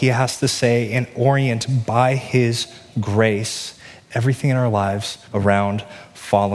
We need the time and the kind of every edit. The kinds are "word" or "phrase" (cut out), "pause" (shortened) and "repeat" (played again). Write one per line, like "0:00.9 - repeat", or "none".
0:05.2 - pause